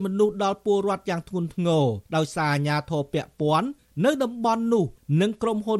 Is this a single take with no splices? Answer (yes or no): no